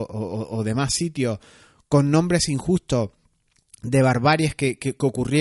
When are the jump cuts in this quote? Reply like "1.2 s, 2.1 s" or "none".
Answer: none

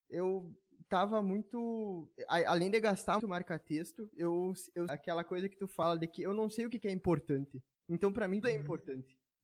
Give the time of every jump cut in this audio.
3.2 s, 4.9 s, 8.4 s

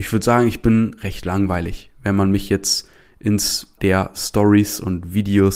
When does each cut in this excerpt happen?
3.8 s

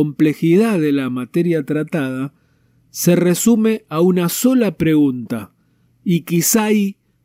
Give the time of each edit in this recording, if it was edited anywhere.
none

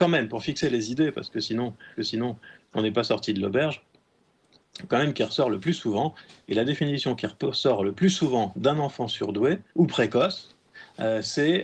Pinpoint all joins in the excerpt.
2.0 s, 4.9 s, 9.7 s

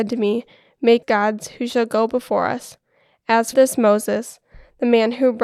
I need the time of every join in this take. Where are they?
1.0 s, 3.5 s

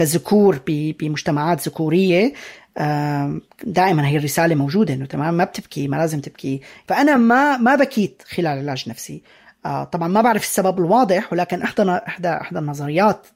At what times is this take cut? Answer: none

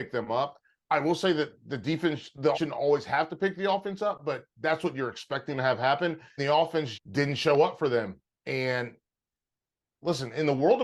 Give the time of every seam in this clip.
2.5 s, 6.4 s, 6.9 s

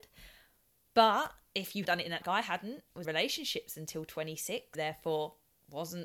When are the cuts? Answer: 1.8 s, 2.2 s, 3.0 s, 4.7 s

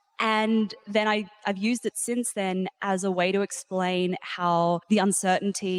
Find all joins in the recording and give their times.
4.8 s

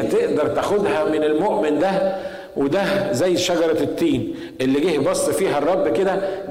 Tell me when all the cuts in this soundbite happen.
none

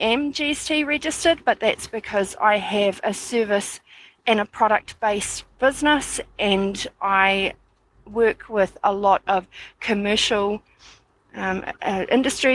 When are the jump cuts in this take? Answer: none

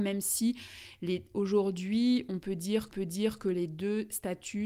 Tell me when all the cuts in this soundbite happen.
2.9 s

